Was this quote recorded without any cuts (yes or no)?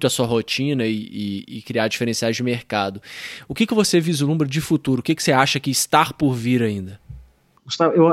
yes